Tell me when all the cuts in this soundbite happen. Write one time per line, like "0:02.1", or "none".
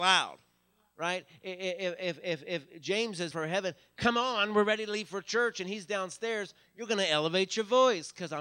0:03.3